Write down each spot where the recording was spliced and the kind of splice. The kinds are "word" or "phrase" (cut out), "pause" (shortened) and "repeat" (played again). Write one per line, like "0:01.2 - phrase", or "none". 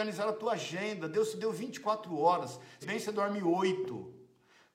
0:02.8 - phrase